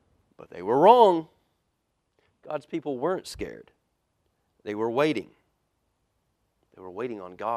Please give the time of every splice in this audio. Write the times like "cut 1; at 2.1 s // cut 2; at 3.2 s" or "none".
none